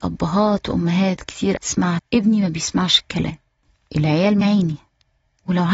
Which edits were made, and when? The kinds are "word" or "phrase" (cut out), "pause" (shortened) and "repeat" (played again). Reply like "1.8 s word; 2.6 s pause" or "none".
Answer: 1.6 s word; 2.0 s word; 4.4 s word